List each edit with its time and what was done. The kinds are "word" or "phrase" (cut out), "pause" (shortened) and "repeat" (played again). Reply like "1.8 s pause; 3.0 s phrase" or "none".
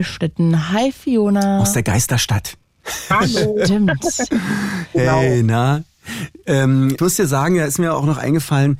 7.0 s word